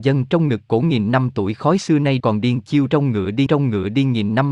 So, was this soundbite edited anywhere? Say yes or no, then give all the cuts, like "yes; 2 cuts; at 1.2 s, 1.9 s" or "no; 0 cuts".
yes; 2 cuts; at 2.2 s, 3.5 s